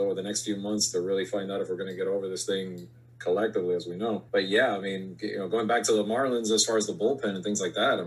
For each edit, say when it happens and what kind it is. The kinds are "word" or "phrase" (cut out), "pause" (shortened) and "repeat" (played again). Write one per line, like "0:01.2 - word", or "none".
0:04.3 - pause